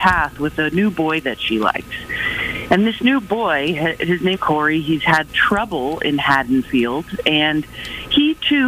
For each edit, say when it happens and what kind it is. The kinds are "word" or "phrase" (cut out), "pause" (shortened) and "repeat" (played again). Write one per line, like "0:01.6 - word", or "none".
0:04.3 - word
0:05.3 - word